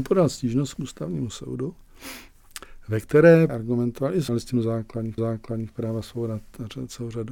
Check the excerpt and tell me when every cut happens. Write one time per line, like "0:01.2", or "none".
0:03.5
0:04.3
0:05.2